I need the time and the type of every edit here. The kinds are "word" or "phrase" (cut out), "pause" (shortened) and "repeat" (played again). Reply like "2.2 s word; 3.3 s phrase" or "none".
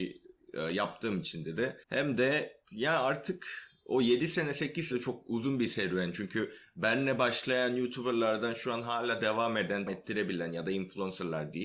1.8 s pause; 2.6 s pause; 4.9 s phrase; 9.9 s word